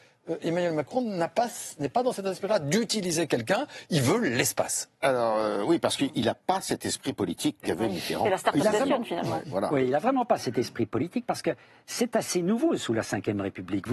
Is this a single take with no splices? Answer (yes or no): yes